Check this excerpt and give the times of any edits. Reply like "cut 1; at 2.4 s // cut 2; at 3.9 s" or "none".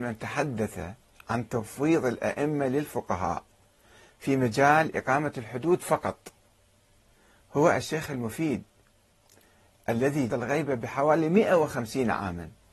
cut 1; at 10.3 s